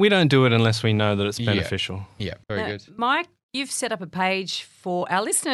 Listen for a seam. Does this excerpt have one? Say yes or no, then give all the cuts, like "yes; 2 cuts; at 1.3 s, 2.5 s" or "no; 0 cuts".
yes; 1 cut; at 2.4 s